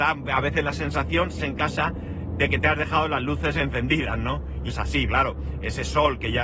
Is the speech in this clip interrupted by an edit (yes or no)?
yes